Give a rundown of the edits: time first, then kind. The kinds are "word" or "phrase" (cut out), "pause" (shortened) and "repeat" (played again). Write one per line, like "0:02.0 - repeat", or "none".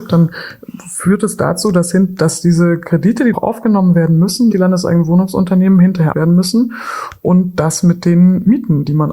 0:03.3 - word
0:04.5 - word
0:06.1 - phrase